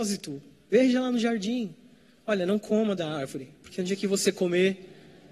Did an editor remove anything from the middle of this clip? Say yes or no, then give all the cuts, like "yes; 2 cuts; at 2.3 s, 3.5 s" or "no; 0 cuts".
no; 0 cuts